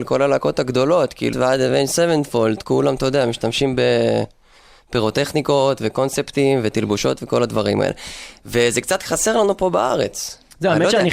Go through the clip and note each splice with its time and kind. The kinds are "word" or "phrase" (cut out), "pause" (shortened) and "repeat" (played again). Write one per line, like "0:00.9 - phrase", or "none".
0:01.3 - word